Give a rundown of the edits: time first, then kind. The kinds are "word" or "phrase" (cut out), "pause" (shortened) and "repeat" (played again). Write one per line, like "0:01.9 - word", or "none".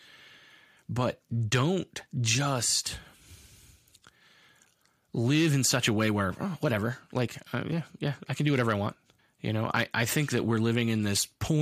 0:02.1 - pause
0:09.2 - pause